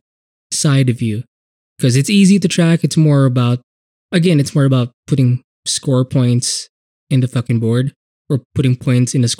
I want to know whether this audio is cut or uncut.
uncut